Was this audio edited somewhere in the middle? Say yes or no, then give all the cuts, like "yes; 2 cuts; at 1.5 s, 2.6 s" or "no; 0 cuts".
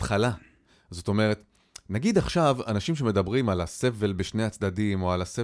no; 0 cuts